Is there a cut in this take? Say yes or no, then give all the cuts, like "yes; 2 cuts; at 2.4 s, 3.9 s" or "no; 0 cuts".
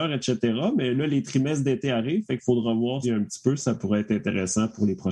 yes; 1 cut; at 3.0 s